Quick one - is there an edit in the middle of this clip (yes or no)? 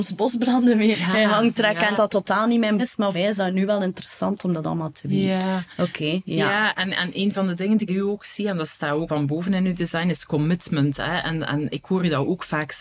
yes